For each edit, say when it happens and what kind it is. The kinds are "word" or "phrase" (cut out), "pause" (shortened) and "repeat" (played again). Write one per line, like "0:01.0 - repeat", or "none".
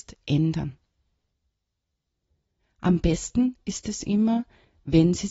none